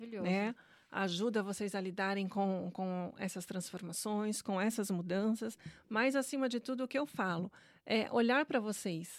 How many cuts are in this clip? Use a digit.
0